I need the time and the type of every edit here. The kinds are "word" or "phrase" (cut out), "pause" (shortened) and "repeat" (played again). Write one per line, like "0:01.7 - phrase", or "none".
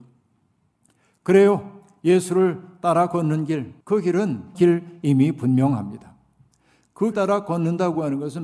0:03.8 - pause
0:04.5 - word
0:07.1 - word